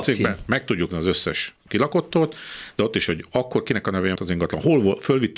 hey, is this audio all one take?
no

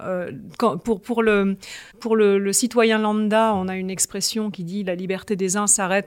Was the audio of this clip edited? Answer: yes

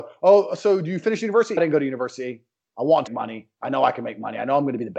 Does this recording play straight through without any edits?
no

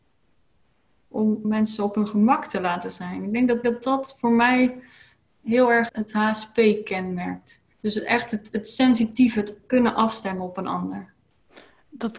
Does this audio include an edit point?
yes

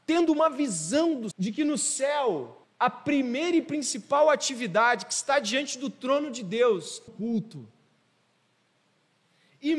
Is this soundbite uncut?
no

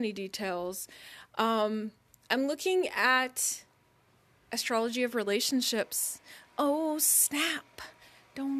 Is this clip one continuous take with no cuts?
yes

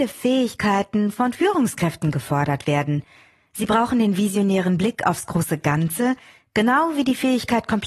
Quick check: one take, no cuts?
yes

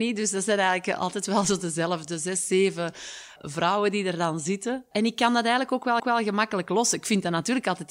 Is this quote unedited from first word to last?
no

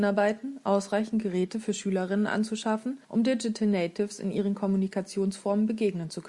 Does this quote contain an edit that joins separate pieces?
yes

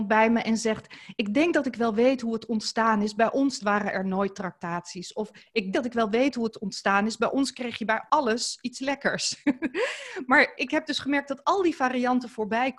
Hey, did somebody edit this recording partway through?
yes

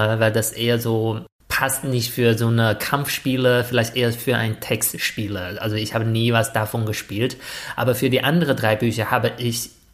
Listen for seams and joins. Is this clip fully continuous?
yes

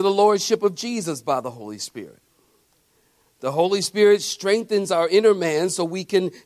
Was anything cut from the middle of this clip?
no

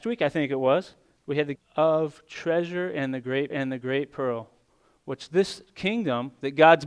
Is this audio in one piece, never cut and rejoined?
no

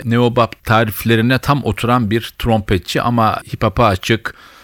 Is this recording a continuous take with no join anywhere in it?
yes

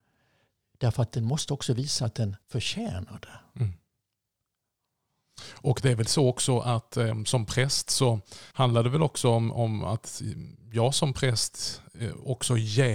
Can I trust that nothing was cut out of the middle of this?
no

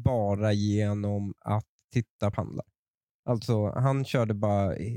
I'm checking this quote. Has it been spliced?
yes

